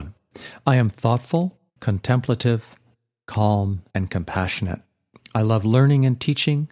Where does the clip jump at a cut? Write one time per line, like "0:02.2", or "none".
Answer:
0:01.7
0:03.9